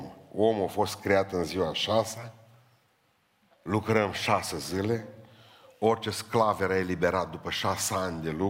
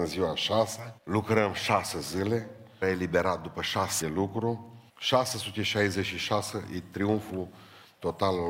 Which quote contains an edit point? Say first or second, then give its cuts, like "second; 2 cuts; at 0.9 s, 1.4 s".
second; 4 cuts; at 1.0 s, 2.8 s, 4.0 s, 4.9 s